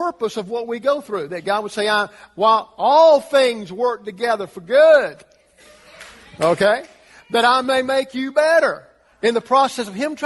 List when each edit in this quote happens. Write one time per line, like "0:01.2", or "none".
none